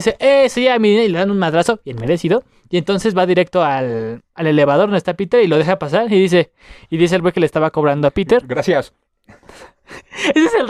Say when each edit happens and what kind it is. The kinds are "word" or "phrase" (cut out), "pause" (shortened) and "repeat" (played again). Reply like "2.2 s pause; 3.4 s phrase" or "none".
none

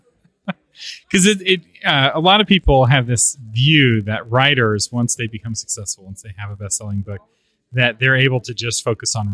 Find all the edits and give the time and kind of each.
none

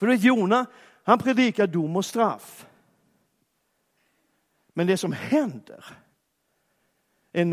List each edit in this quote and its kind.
none

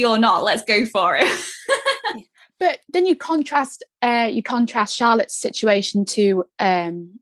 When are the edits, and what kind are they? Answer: none

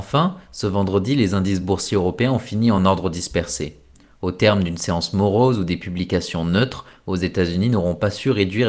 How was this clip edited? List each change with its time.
none

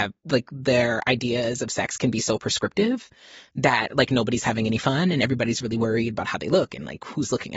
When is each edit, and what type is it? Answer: none

